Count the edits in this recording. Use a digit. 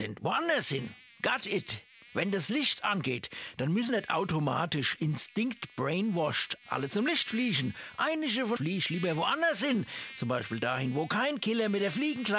2